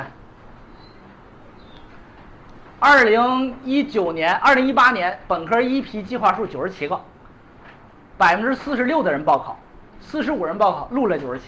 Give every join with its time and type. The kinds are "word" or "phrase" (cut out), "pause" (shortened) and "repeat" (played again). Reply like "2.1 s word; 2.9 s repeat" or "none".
2.7 s pause